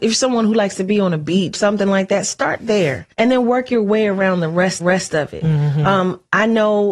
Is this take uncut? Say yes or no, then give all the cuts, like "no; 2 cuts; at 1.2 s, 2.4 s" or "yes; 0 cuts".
no; 3 cuts; at 1.5 s, 3.1 s, 4.8 s